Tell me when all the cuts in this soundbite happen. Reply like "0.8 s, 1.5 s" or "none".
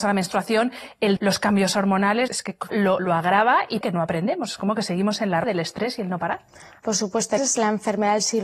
1.2 s, 2.3 s, 2.7 s, 3.0 s, 3.8 s, 5.4 s, 7.4 s